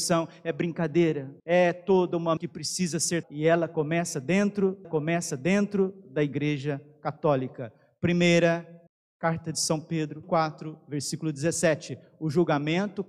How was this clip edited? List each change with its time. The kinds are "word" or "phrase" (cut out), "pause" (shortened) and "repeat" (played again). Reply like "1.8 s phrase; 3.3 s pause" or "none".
1.4 s pause; 2.4 s word; 3.2 s word; 4.8 s repeat; 8.9 s pause; 10.2 s word